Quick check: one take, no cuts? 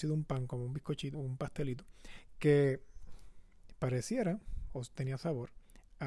no; 1 cut; at 1.1 s

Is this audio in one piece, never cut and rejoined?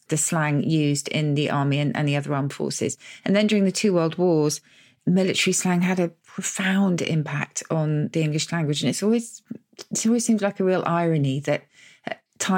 yes; 0 cuts

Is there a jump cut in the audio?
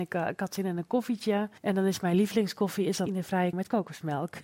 yes; 3 cuts; at 1.6 s, 3.1 s, 3.5 s

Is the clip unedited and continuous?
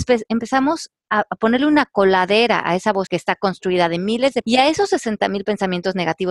no; 2 cuts; at 3.1 s, 4.4 s

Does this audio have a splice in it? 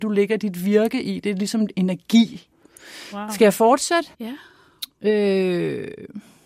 yes; 1 cut; at 4.1 s

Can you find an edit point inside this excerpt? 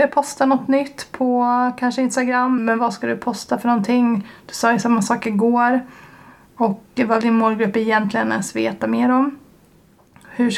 yes; 2 cuts; at 2.6 s, 7.2 s

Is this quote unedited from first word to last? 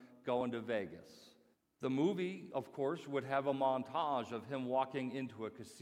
no; 1 cut; at 1.5 s

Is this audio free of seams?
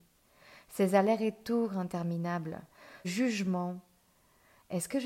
no; 1 cut; at 3.0 s

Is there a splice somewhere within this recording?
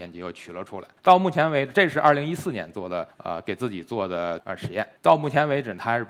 yes; 3 cuts; at 1.0 s, 3.1 s, 5.0 s

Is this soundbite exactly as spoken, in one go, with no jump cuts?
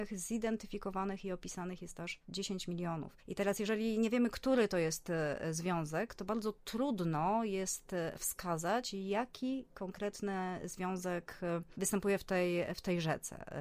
yes; 0 cuts

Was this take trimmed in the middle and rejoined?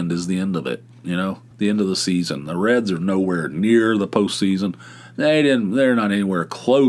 yes; 1 cut; at 1.5 s

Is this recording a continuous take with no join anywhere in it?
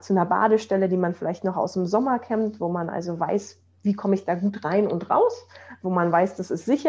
yes; 0 cuts

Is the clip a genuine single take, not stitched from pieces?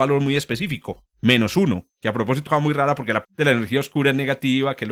no; 2 cuts; at 2.5 s, 3.2 s

